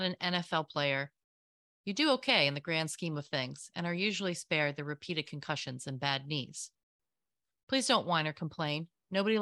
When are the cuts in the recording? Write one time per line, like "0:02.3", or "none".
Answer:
none

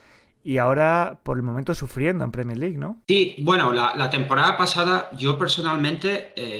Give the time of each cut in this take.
0:03.0

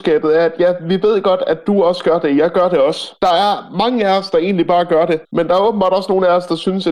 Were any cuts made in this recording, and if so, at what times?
0:05.2

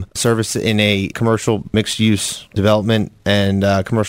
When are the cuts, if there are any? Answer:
none

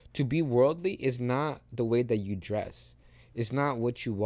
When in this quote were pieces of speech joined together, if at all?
none

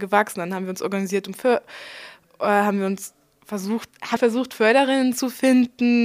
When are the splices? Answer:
0:04.2

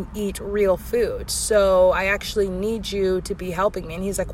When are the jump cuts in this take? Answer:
none

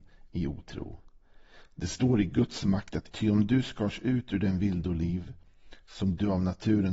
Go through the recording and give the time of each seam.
0:03.1

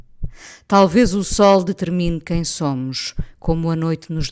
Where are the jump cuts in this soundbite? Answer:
none

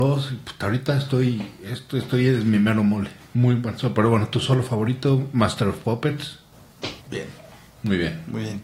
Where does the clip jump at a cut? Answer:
0:07.0

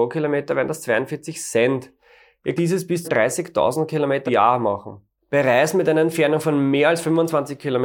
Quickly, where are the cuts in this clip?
0:02.6
0:03.0
0:04.3

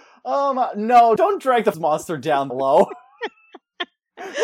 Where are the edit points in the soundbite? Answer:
0:01.2
0:01.7
0:02.5

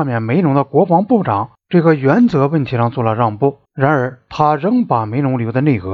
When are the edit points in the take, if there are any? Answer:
0:03.6

